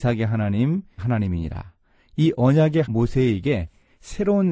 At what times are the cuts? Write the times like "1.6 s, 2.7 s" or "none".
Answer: 1.0 s, 2.8 s